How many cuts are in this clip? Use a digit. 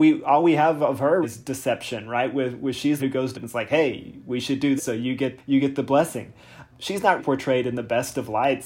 7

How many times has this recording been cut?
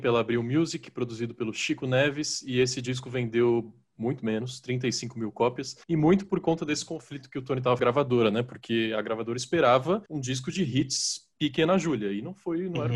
4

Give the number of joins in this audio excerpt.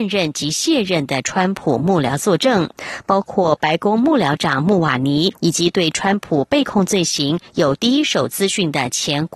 1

